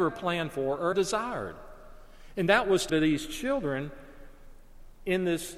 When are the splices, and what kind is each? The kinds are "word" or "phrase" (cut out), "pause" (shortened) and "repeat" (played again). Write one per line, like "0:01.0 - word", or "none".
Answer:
0:00.9 - word
0:02.9 - word